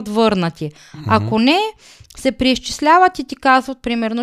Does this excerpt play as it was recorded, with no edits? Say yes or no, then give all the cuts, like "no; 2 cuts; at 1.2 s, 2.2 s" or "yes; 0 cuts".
yes; 0 cuts